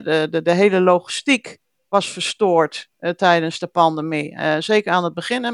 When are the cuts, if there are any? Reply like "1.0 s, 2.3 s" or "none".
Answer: none